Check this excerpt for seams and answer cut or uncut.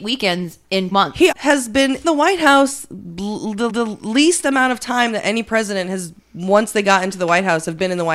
cut